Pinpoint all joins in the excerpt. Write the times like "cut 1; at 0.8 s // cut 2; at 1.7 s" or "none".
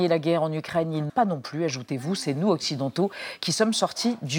cut 1; at 1.1 s

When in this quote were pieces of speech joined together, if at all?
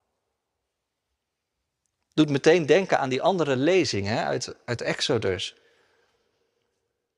none

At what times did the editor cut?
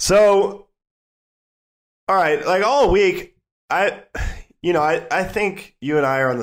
none

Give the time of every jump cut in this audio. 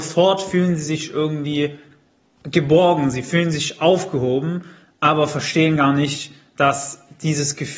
none

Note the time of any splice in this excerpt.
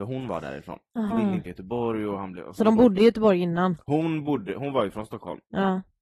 cut 1; at 1.1 s // cut 2; at 1.5 s

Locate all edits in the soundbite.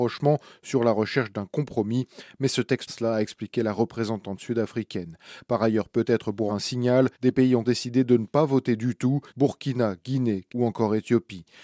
cut 1; at 2.9 s // cut 2; at 6.5 s // cut 3; at 7.1 s // cut 4; at 7.6 s // cut 5; at 9.3 s // cut 6; at 10.5 s

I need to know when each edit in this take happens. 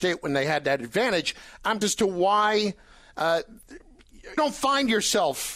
cut 1; at 1.8 s // cut 2; at 4.4 s

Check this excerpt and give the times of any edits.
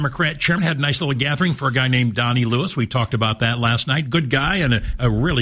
none

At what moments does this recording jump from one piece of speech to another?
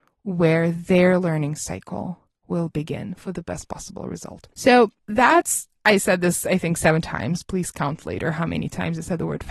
cut 1; at 5.0 s

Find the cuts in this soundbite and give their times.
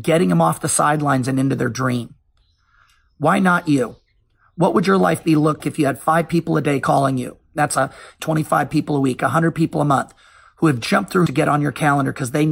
cut 1; at 5.6 s // cut 2; at 11.3 s

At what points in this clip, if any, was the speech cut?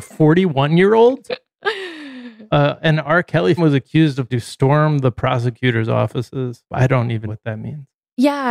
cut 1; at 3.6 s // cut 2; at 4.3 s // cut 3; at 6.7 s // cut 4; at 7.3 s

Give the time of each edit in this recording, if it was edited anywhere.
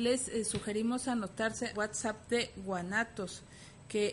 cut 1; at 1.7 s

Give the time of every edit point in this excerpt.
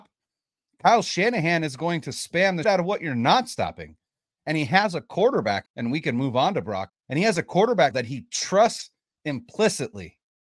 cut 1; at 2.6 s // cut 2; at 5.7 s // cut 3; at 6.9 s // cut 4; at 7.9 s

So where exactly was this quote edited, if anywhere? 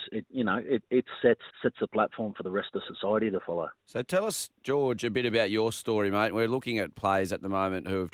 cut 1; at 1.5 s // cut 2; at 3.8 s

